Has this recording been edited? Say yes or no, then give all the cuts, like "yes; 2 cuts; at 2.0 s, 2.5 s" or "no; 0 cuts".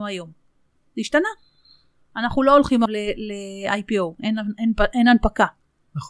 yes; 1 cut; at 2.9 s